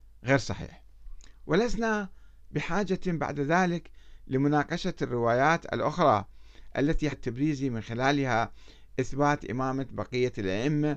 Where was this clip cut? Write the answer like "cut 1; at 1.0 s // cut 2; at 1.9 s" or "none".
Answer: cut 1; at 7.1 s